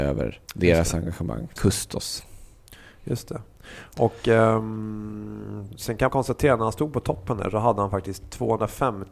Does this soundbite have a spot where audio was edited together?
yes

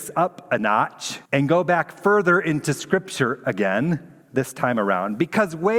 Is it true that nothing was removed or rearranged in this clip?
no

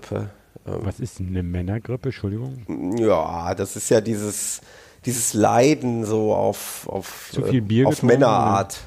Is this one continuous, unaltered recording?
yes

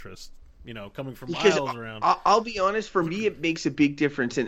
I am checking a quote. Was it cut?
no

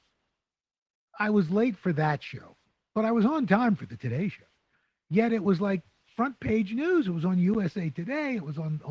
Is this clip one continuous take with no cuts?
yes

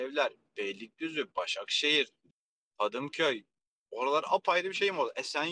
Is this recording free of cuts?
yes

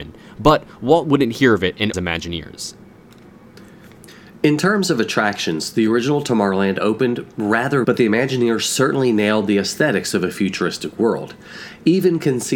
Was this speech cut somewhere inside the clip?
yes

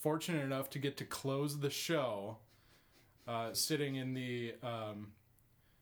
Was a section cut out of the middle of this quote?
yes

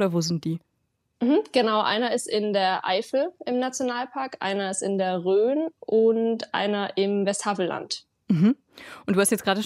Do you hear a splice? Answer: no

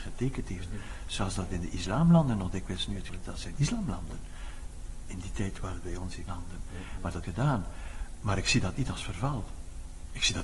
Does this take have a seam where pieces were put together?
yes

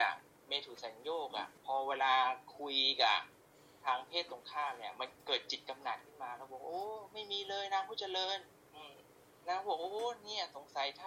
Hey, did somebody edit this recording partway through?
yes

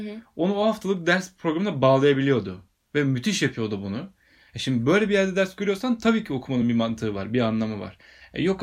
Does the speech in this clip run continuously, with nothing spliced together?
yes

